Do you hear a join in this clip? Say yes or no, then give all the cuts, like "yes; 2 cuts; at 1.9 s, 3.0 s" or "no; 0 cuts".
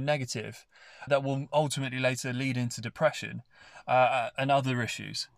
yes; 1 cut; at 1.1 s